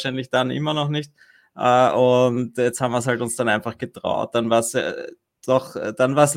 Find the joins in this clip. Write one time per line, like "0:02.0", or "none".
none